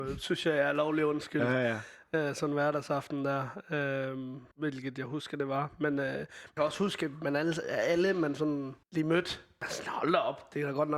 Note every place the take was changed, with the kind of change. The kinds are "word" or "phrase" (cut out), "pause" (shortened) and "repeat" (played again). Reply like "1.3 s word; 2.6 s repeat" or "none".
4.5 s pause; 6.6 s phrase; 8.8 s pause; 9.6 s word